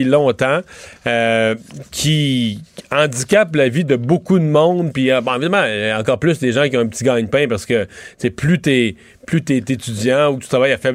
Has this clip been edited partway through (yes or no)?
no